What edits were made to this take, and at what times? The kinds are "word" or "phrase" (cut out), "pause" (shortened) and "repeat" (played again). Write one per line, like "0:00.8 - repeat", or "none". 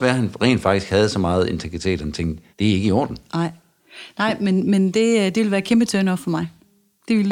0:02.5 - pause